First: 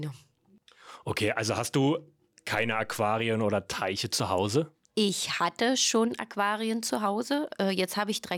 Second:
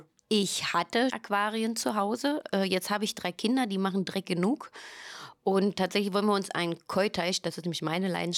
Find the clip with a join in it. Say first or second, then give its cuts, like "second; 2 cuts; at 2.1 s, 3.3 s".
second; 1 cut; at 1.1 s